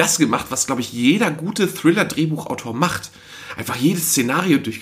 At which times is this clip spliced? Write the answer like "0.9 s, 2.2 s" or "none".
none